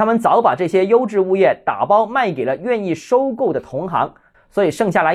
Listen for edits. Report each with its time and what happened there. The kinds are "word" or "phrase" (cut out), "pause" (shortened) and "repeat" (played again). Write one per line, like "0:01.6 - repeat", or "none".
none